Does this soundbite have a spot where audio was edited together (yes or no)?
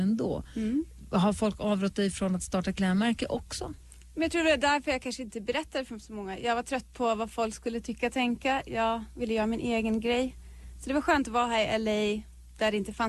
no